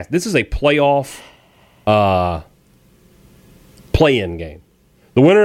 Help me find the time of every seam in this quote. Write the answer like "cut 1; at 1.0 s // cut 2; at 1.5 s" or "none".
none